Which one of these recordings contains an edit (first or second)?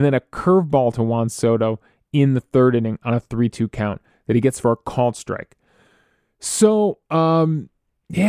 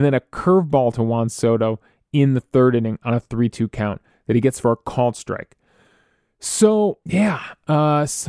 second